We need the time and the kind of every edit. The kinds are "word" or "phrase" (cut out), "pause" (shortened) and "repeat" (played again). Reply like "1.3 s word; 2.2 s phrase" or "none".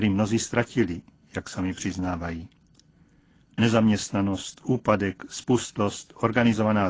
none